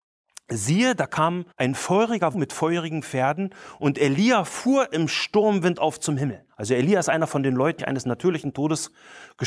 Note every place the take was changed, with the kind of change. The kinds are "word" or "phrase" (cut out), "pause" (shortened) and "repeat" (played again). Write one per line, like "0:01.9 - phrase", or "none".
0:01.5 - pause
0:02.3 - word
0:07.8 - phrase